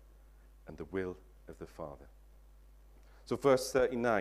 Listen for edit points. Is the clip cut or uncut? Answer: uncut